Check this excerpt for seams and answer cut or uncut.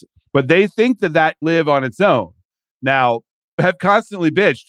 cut